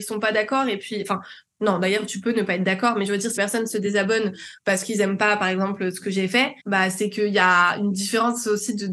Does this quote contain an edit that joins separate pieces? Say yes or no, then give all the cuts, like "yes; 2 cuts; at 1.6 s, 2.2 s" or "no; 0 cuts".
yes; 2 cuts; at 3.4 s, 6.6 s